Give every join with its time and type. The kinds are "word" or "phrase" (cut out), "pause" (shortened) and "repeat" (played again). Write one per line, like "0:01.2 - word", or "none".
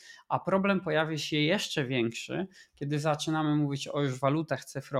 none